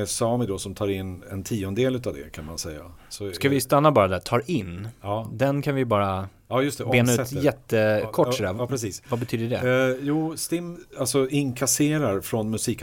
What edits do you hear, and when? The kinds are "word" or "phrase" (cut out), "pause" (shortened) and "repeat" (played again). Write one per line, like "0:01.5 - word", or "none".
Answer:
none